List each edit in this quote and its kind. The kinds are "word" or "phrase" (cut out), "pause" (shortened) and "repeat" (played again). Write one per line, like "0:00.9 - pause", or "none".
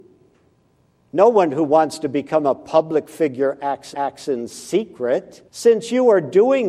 0:03.9 - repeat
0:05.5 - pause